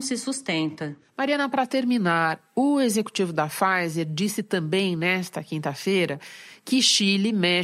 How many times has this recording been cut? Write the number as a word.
zero